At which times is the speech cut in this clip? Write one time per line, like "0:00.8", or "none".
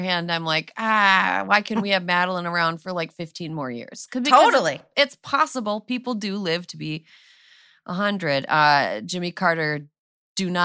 none

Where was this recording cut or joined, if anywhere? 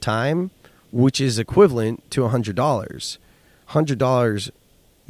none

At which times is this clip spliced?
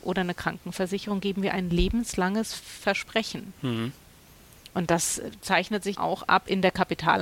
0:05.9

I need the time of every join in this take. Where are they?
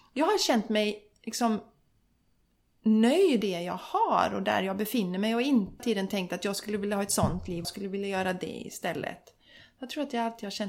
0:03.4
0:05.8
0:07.6

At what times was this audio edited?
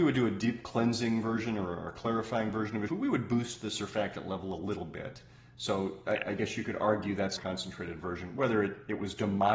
0:02.9
0:07.4

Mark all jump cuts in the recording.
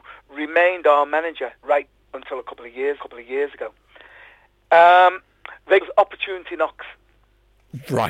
0:01.6
0:03.0
0:05.8

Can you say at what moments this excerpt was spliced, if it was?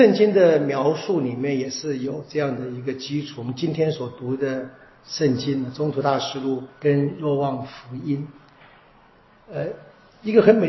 0:06.7

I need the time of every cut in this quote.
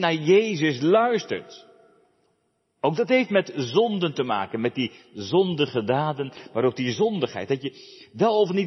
none

